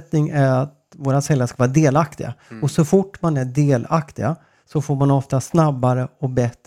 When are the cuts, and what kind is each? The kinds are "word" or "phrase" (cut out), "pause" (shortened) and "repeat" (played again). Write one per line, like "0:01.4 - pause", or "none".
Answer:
none